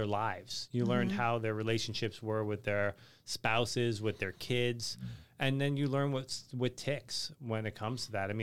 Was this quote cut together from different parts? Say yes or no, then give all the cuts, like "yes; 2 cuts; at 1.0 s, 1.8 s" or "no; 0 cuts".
no; 0 cuts